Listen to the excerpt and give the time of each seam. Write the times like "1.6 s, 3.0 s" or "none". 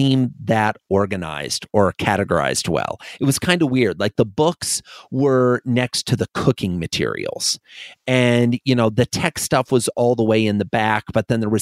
none